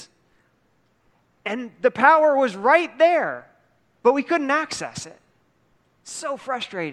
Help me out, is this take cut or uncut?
uncut